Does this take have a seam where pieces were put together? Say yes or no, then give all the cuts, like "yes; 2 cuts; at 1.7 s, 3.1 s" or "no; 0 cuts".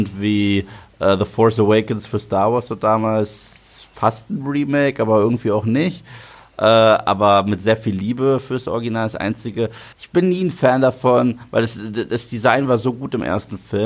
yes; 1 cut; at 9.9 s